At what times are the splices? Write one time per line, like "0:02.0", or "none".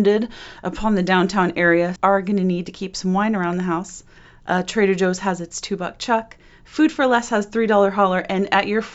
0:02.0

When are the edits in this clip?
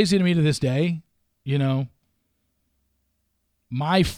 none

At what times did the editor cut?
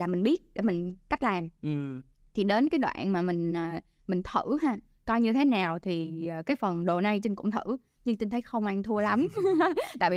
none

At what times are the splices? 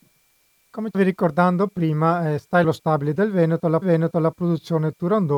0:00.9
0:02.6
0:03.8

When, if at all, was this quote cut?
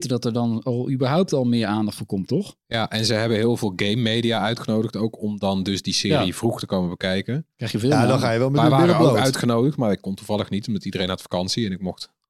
none

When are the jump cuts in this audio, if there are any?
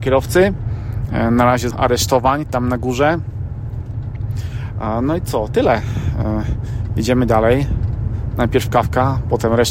0:01.7

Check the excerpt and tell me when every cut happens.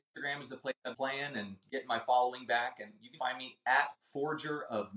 0:00.9
0:03.2
0:03.9

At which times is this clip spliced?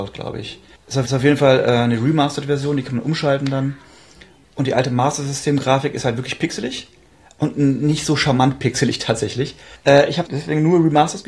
0:01.0
0:10.2

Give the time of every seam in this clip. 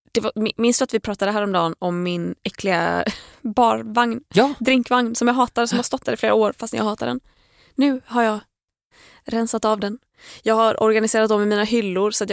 none

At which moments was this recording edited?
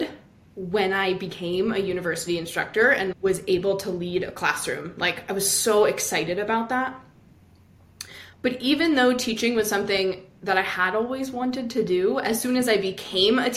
none

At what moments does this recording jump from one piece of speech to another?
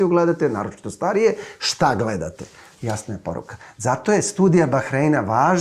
none

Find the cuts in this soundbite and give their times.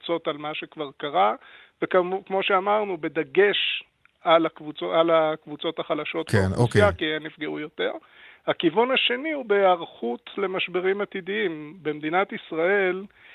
none

